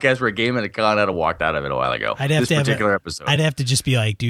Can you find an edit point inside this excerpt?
no; 0 cuts

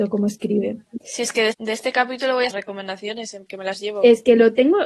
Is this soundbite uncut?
no; 3 cuts; at 1.5 s, 2.5 s, 3.5 s

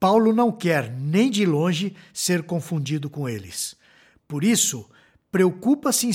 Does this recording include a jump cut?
no; 0 cuts

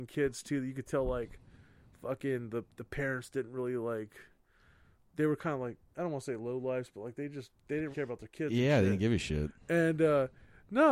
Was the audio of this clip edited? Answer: yes; 1 cut; at 7.9 s

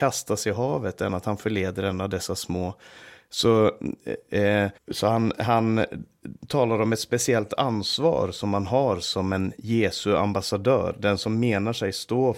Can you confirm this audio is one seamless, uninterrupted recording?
no; 1 cut; at 4.8 s

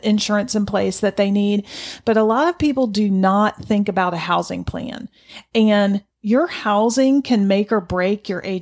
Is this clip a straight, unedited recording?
no; 1 cut; at 6.1 s

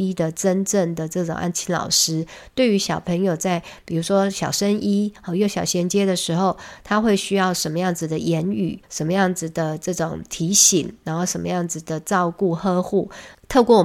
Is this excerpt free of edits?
no; 1 cut; at 8.8 s

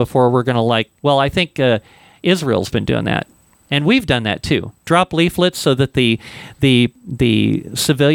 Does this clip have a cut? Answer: yes; 1 cut; at 1.0 s

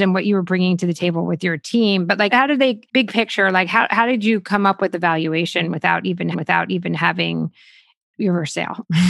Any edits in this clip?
yes; 3 cuts; at 2.3 s, 2.9 s, 6.3 s

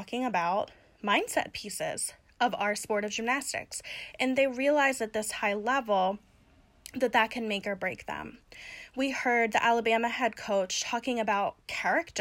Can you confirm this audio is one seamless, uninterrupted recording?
yes; 0 cuts

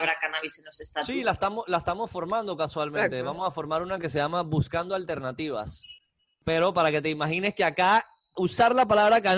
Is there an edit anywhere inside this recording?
no; 0 cuts

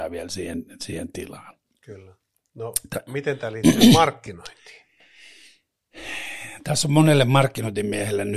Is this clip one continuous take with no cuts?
yes; 0 cuts

